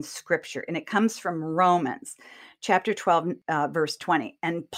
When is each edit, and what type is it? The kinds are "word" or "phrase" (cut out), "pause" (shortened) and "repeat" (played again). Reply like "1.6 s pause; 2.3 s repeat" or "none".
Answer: none